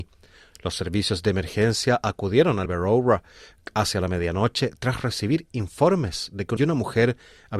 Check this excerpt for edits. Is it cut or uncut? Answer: cut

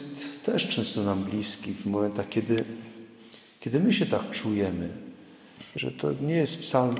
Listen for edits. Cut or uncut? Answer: uncut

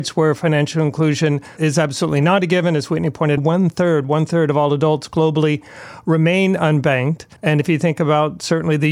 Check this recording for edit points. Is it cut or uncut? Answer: cut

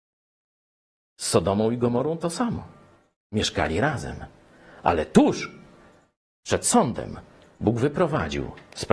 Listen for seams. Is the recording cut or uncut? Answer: uncut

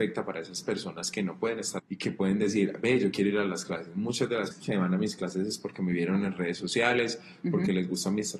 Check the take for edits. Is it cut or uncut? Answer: cut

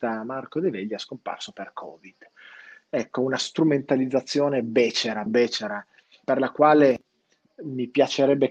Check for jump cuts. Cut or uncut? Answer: cut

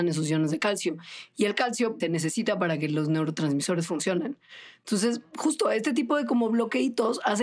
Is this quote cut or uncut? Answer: cut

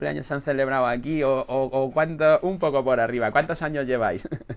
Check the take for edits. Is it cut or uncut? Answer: uncut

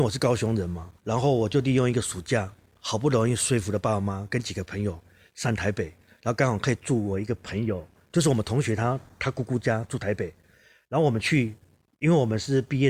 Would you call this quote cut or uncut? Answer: cut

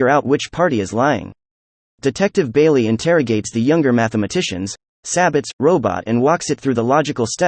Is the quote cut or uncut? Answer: uncut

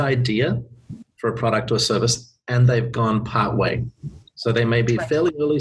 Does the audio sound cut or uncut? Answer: uncut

